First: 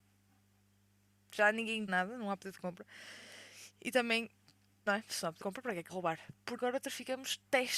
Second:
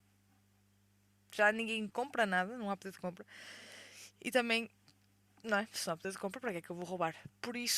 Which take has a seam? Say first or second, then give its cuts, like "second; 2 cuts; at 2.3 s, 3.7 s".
first; 5 cuts; at 1.9 s, 4.9 s, 5.4 s, 5.9 s, 6.6 s